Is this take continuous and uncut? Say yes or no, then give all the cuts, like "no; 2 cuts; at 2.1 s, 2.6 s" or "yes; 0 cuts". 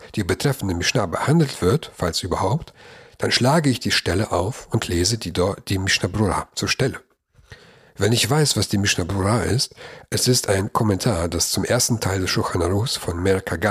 yes; 0 cuts